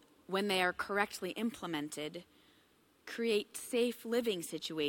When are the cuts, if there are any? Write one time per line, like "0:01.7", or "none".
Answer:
none